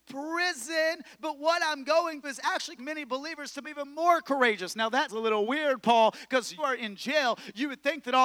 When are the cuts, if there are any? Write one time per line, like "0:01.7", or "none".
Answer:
0:02.2
0:02.8
0:03.6
0:05.1
0:06.6

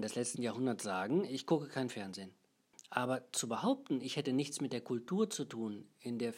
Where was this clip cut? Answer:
none

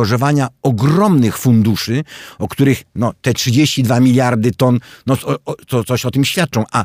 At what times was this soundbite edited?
none

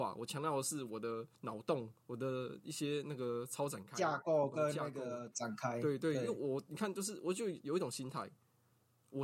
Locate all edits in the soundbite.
0:01.4
0:02.0

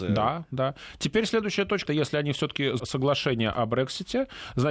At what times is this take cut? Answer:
0:01.9
0:02.8

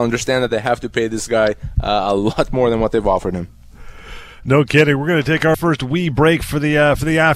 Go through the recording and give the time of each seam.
0:05.5

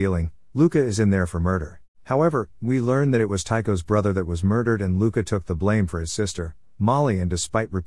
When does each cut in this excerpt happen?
0:01.9

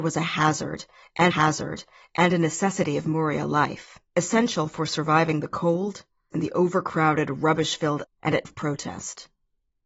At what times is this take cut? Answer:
0:01.3
0:04.1
0:06.3
0:08.0
0:08.4

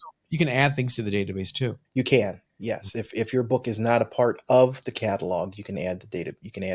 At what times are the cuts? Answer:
0:01.8

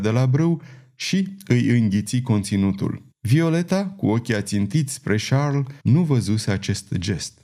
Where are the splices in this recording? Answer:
0:03.1
0:05.8

